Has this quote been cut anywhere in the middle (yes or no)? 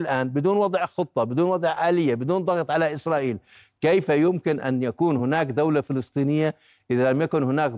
no